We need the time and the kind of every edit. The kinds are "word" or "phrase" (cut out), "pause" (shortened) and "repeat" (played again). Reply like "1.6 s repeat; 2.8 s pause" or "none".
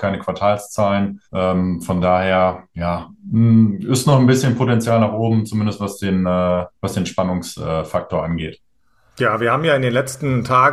1.2 s pause